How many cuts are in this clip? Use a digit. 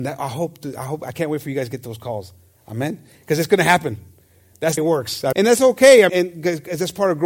3